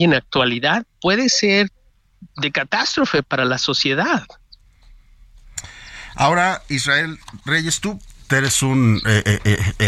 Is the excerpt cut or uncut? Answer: cut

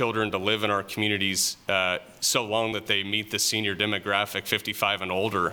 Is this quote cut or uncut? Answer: uncut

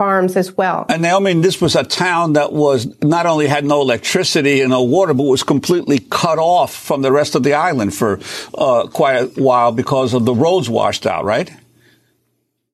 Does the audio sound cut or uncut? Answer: uncut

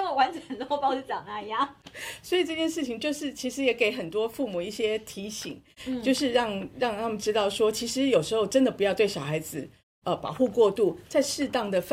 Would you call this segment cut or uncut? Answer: uncut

